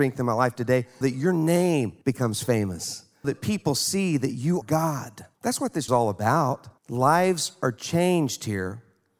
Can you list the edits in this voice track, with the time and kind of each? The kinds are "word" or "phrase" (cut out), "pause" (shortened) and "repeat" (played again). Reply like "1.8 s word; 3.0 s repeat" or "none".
1.0 s word; 2.0 s pause; 3.2 s word; 4.6 s word; 5.3 s pause; 5.9 s phrase; 6.8 s pause